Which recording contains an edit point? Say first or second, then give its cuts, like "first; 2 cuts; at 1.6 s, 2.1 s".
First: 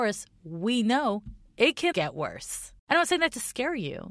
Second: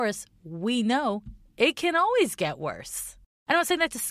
first; 2 cuts; at 1.9 s, 2.8 s